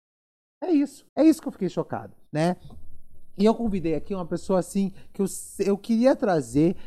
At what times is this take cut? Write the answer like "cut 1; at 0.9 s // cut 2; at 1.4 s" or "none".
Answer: cut 1; at 1.1 s // cut 2; at 2.3 s